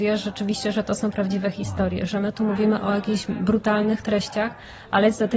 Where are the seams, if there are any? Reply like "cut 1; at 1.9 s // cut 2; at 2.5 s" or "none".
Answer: none